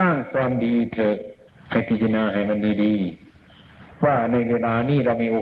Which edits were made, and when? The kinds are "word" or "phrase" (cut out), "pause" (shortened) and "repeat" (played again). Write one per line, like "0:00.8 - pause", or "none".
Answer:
0:01.5 - pause